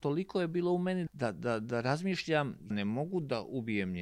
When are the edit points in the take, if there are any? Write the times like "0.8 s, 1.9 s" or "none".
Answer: 1.1 s, 2.7 s